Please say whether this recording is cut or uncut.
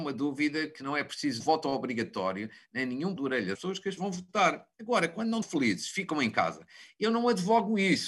cut